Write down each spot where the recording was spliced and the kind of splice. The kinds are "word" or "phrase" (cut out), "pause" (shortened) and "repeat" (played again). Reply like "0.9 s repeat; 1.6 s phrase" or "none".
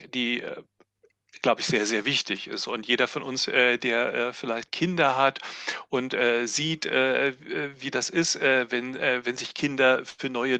4.7 s word